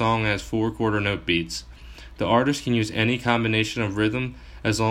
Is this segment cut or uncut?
uncut